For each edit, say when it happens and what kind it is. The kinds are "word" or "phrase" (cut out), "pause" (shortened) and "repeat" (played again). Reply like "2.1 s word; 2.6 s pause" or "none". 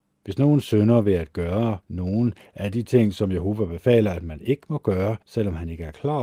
1.8 s pause; 5.2 s pause